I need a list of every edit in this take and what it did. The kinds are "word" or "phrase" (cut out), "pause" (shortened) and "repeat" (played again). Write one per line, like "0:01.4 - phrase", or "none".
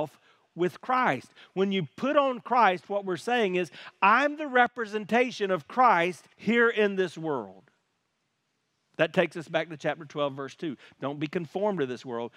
0:06.3 - pause